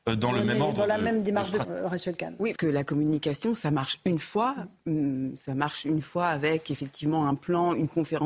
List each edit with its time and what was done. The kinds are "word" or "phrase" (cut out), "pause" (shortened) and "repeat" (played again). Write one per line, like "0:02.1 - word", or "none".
0:01.6 - word
0:02.6 - word